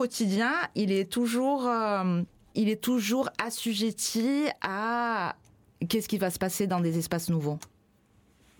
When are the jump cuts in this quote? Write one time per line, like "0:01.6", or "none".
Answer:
0:02.5